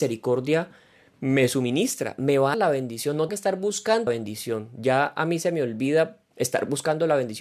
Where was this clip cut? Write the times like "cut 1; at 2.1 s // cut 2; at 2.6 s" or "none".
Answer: cut 1; at 1.0 s // cut 2; at 2.5 s // cut 3; at 3.3 s // cut 4; at 4.1 s // cut 5; at 6.3 s